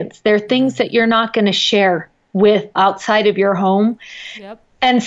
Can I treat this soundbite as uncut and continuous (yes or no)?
no